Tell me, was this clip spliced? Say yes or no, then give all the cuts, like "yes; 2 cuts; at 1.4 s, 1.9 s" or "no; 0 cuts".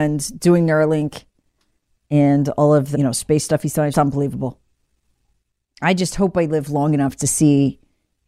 yes; 2 cuts; at 2.9 s, 3.9 s